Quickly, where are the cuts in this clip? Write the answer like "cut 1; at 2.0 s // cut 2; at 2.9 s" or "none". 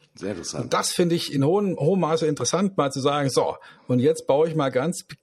none